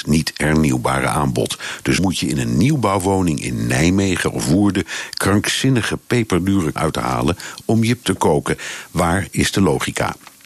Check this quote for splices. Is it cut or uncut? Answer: cut